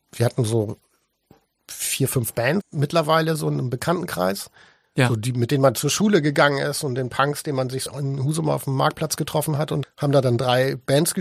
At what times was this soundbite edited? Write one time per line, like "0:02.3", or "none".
0:02.6
0:07.9
0:09.8